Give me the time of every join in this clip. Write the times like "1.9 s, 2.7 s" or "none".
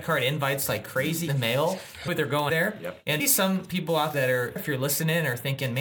1.3 s, 2.1 s, 2.5 s, 3.2 s, 4.1 s, 4.6 s